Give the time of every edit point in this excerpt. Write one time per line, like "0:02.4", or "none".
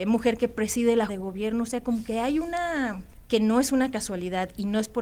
0:01.1
0:03.3